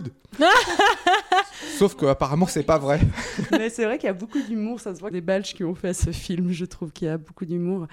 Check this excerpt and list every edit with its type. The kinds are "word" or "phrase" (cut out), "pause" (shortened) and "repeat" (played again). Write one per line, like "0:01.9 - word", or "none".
0:05.1 - phrase